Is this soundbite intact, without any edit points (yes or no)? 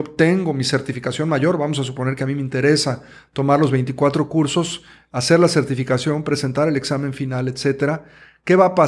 yes